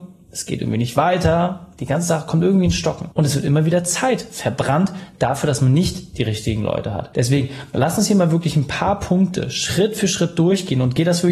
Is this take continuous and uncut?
yes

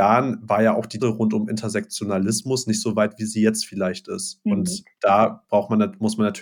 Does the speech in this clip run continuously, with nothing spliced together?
no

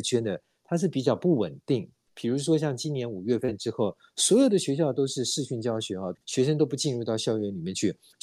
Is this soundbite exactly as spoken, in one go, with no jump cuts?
no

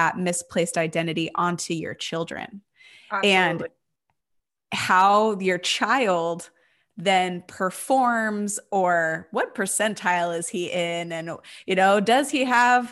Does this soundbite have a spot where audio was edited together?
no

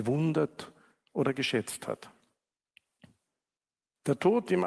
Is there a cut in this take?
no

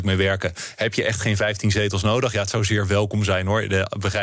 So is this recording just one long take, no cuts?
yes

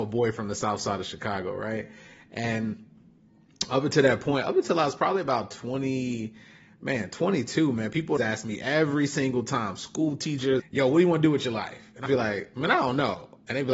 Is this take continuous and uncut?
no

